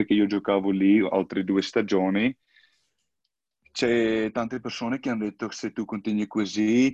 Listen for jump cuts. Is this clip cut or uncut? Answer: uncut